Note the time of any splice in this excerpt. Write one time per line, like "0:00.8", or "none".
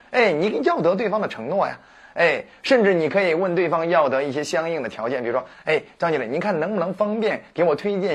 none